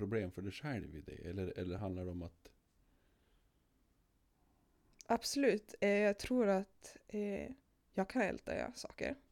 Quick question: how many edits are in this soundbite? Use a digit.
0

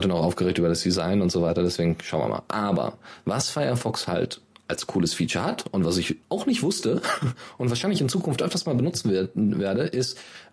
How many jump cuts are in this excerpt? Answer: 1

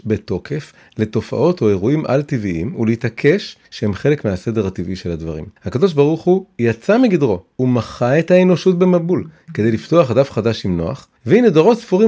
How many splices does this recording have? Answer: 3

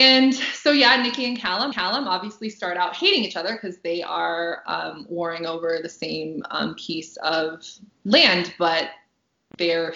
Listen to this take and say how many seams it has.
1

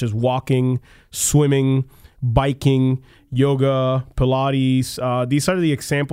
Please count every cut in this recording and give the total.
0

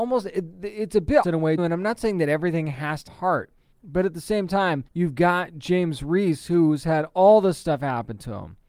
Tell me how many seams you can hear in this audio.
5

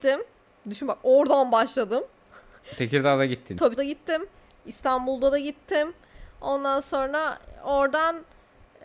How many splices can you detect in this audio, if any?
1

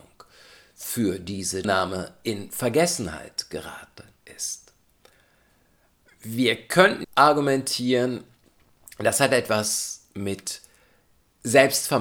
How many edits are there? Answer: 3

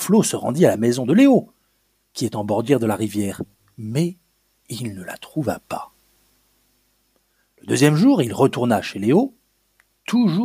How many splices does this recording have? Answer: 0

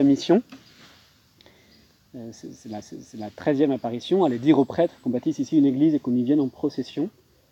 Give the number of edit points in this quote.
1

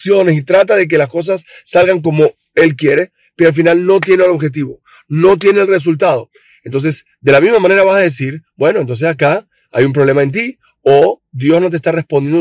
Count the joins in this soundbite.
0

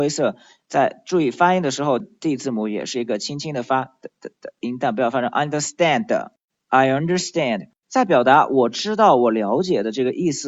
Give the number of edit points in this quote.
2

